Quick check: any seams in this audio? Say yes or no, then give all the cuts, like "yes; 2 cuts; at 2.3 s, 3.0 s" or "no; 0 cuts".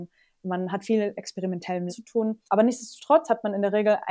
yes; 3 cuts; at 1.1 s, 1.9 s, 2.4 s